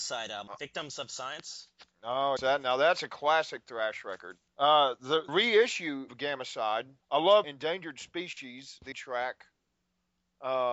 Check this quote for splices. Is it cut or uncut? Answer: cut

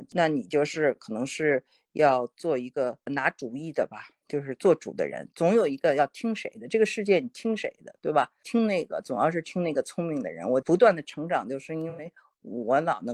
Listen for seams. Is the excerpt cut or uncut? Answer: uncut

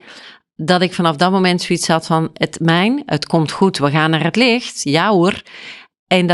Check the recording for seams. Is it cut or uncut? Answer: uncut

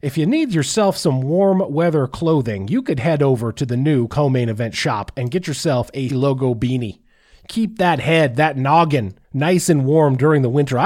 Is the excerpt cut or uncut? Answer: cut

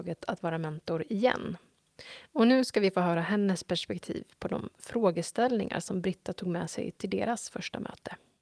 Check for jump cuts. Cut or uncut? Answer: uncut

